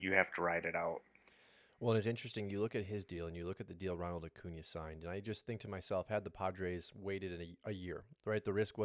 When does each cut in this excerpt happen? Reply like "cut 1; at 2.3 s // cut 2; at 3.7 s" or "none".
none